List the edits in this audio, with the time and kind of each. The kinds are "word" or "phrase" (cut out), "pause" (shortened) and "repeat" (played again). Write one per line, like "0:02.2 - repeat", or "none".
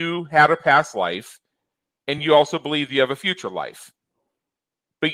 none